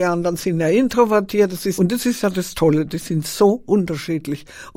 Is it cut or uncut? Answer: cut